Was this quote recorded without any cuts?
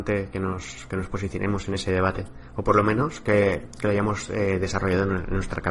yes; 0 cuts

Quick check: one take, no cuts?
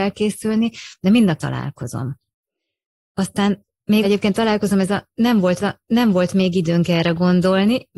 no; 3 cuts; at 1.4 s, 4.0 s, 5.6 s

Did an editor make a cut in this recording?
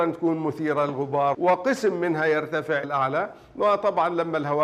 yes; 2 cuts; at 1.3 s, 2.8 s

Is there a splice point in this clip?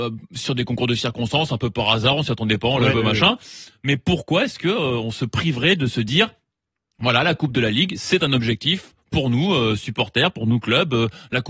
yes; 1 cut; at 2.9 s

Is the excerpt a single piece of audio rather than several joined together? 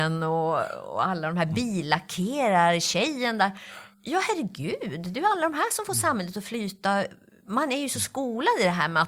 no; 1 cut; at 3.9 s

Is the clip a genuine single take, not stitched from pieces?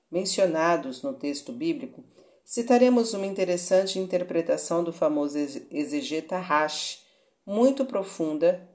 yes; 0 cuts

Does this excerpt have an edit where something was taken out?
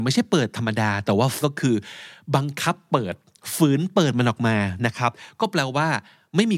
yes; 1 cut; at 1.4 s

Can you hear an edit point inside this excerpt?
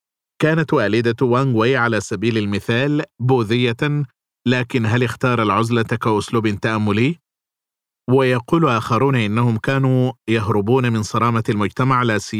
no; 0 cuts

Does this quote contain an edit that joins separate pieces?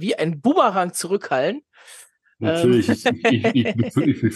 no; 0 cuts

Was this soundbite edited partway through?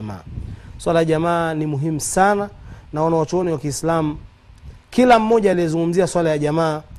no; 0 cuts

